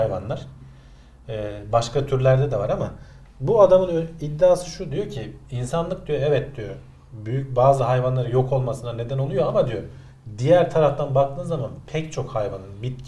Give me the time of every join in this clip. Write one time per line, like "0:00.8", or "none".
none

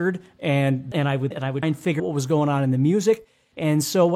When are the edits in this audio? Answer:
0:00.9
0:01.3
0:01.6
0:02.0

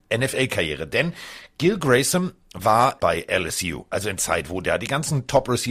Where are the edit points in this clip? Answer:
0:03.0
0:04.2

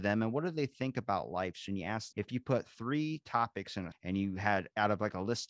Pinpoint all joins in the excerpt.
0:02.1
0:03.9

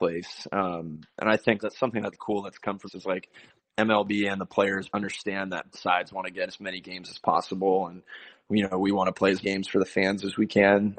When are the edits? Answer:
0:01.6
0:02.1
0:02.9
0:04.9
0:05.7
0:06.5
0:09.4

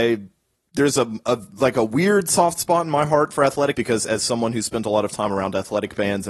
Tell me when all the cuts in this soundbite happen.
0:03.7

